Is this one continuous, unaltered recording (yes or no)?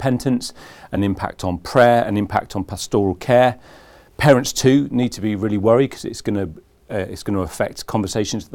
yes